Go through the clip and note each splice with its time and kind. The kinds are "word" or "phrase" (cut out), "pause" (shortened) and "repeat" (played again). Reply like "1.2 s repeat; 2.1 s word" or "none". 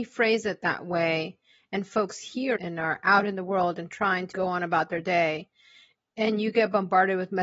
2.5 s word; 4.3 s word